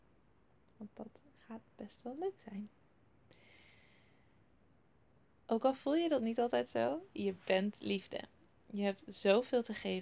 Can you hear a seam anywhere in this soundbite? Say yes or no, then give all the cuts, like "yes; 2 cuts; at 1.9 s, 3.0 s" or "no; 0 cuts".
no; 0 cuts